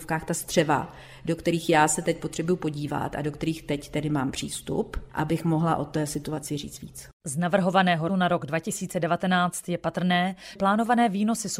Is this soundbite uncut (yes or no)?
no